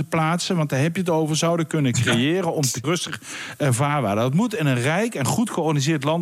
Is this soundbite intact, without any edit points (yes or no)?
no